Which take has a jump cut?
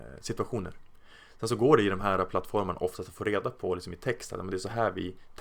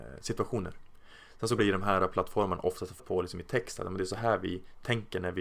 second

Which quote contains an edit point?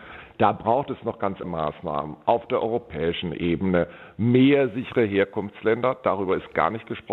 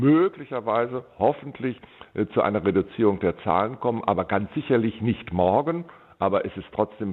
first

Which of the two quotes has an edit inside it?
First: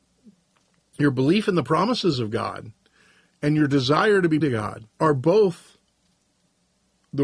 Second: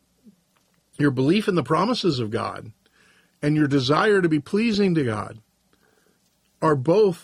first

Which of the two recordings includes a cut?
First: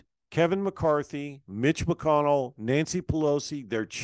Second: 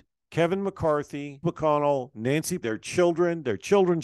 second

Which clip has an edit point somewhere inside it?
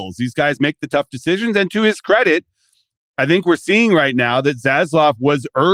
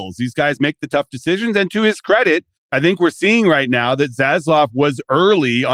second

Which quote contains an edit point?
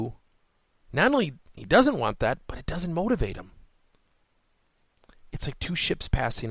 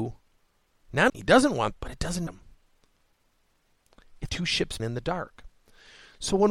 second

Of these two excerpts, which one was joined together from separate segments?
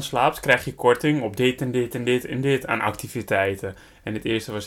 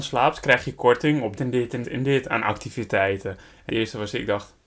second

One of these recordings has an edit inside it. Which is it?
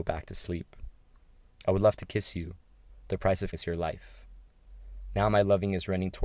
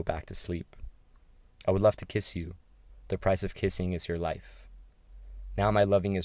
first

